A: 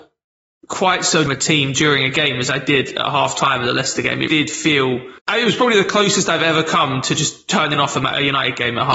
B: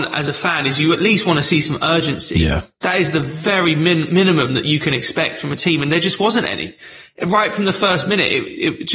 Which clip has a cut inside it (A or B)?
A